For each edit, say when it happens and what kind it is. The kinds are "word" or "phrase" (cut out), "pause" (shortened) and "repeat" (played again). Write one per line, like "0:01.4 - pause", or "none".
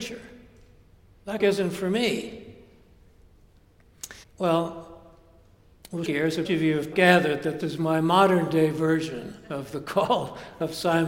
0:01.4 - phrase
0:04.2 - pause
0:06.0 - word
0:06.4 - word
0:06.9 - word
0:07.6 - word